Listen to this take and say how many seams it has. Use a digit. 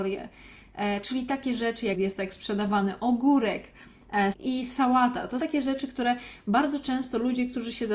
3